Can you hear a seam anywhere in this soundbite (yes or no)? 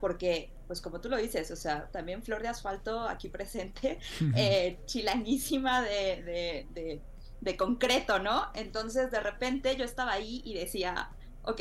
no